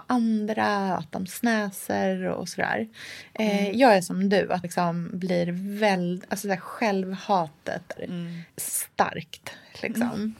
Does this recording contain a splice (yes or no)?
yes